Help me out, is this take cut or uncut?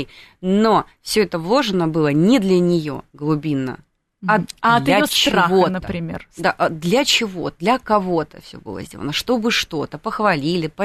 uncut